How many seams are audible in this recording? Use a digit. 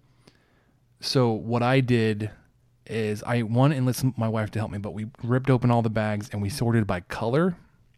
0